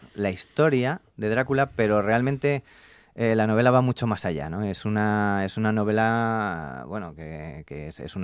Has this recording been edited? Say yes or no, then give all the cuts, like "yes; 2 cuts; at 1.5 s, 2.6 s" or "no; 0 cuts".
no; 0 cuts